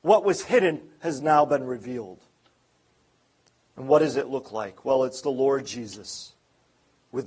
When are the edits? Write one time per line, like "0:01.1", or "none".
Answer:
none